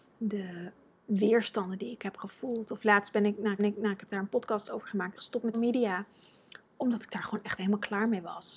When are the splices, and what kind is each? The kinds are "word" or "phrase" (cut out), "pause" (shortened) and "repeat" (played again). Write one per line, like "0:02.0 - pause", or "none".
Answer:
0:03.6 - repeat
0:05.2 - word
0:05.5 - word
0:07.6 - word